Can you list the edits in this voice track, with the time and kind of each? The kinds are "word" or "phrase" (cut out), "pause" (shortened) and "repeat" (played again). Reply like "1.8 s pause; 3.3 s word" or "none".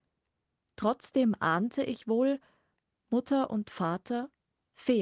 none